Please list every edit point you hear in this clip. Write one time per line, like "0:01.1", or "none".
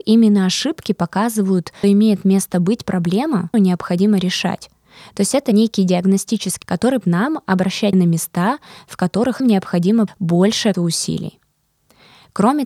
0:01.8
0:03.5
0:06.6
0:07.0
0:07.9
0:09.4
0:10.1
0:10.7